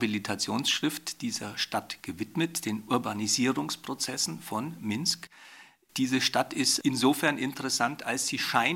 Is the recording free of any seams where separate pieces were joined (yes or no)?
yes